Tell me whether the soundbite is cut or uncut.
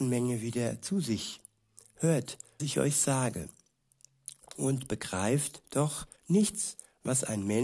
cut